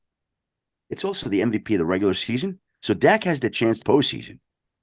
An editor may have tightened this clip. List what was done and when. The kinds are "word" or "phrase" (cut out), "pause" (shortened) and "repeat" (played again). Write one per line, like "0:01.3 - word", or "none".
0:02.7 - pause
0:03.8 - phrase